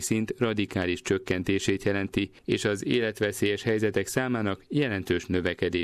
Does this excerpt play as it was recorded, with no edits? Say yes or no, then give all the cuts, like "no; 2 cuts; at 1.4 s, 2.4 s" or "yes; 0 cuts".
no; 1 cut; at 2.4 s